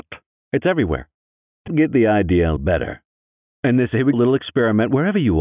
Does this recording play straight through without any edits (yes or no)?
no